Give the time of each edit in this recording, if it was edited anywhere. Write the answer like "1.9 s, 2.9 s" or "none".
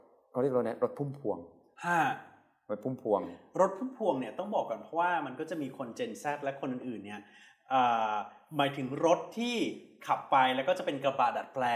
none